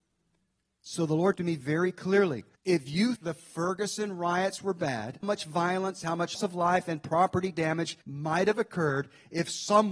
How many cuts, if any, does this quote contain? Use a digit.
6